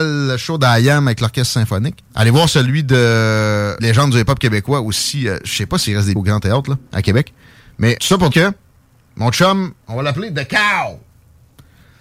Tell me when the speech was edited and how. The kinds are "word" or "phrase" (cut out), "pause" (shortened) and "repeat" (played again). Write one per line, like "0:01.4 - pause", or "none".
0:02.1 - pause
0:03.8 - word
0:06.2 - word
0:06.9 - pause
0:08.0 - word
0:08.3 - word
0:09.8 - pause